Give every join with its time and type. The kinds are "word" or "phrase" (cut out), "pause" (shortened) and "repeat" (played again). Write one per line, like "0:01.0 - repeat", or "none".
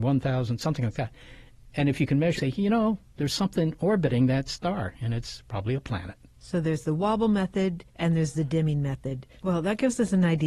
0:02.4 - phrase
0:07.9 - pause
0:09.4 - pause